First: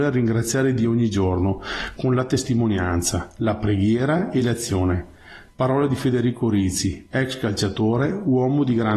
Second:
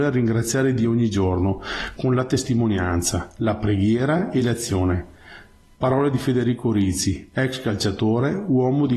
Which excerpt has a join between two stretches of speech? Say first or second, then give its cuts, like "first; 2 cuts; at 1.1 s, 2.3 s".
first; 1 cut; at 5.5 s